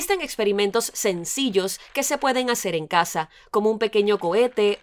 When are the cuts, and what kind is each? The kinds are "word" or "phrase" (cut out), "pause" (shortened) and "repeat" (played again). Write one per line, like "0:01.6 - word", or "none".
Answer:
none